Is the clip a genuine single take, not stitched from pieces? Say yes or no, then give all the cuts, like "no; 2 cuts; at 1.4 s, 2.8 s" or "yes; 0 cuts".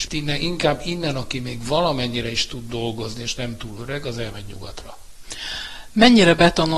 yes; 0 cuts